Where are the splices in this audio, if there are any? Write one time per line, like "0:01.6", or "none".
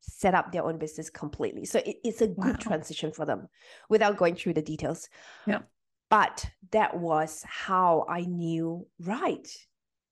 none